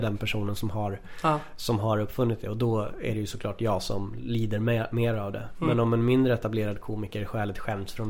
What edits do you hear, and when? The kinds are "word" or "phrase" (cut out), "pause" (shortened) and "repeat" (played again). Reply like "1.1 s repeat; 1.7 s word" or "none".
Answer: none